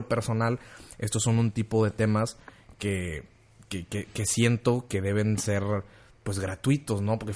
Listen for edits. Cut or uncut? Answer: uncut